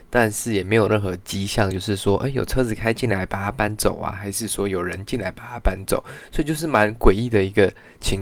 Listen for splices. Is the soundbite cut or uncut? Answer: uncut